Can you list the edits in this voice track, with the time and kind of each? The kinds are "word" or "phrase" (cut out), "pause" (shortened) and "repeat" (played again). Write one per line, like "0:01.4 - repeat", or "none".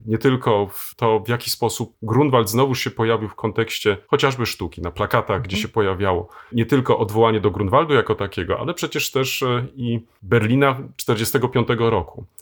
0:04.0 - pause